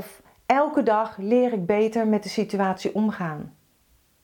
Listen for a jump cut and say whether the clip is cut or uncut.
uncut